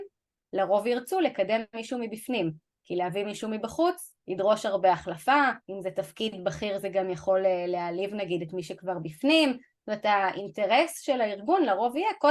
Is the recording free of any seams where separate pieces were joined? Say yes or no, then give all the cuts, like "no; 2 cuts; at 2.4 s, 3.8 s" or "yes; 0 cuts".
no; 2 cuts; at 4.2 s, 5.6 s